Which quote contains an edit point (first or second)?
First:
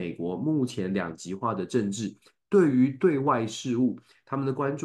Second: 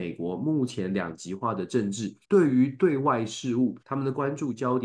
second